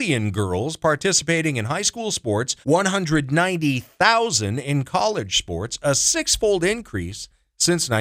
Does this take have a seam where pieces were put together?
yes; 1 cut; at 2.6 s

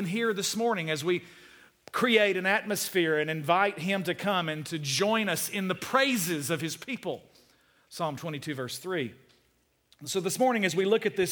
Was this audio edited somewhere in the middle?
no; 0 cuts

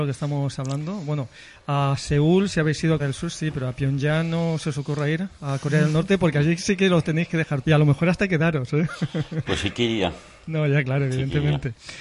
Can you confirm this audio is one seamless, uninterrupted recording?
no; 2 cuts; at 3.0 s, 7.6 s

